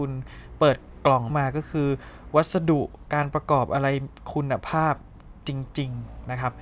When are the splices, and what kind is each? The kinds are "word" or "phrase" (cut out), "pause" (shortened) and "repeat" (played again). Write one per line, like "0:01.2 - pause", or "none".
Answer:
0:01.3 - word